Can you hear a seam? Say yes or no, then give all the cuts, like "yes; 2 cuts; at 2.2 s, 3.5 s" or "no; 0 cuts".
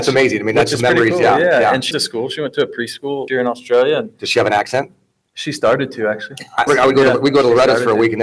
yes; 3 cuts; at 1.9 s, 3.3 s, 6.7 s